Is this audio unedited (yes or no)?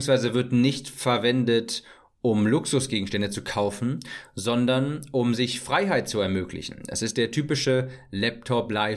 yes